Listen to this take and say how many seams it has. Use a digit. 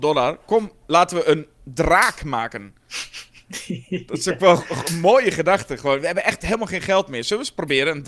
0